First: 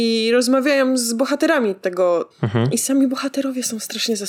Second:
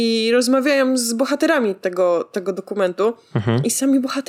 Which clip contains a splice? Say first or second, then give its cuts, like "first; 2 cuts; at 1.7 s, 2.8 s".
first; 1 cut; at 2.3 s